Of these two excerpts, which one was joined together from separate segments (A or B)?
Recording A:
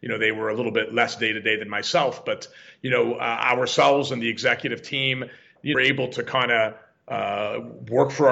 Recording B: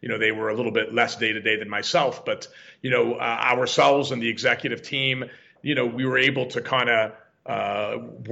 A